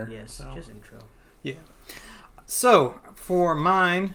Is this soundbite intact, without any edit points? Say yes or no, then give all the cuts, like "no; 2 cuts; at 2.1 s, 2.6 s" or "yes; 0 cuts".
yes; 0 cuts